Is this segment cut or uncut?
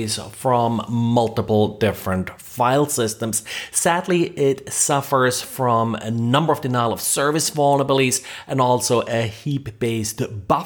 uncut